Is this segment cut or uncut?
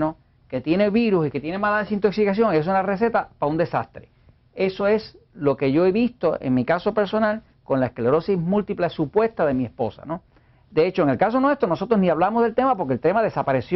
uncut